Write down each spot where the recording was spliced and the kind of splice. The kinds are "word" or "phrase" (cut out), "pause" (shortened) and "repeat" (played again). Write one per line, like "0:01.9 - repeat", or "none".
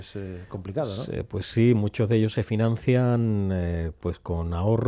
none